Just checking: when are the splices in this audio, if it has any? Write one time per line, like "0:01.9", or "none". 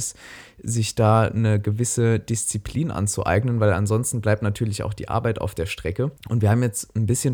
0:06.2